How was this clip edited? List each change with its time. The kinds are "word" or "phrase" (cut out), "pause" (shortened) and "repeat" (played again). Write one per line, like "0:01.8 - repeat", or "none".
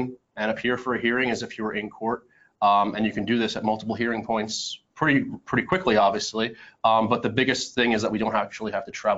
none